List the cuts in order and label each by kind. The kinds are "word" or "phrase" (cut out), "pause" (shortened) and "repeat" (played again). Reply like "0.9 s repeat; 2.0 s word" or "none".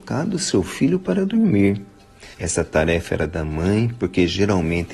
2.3 s pause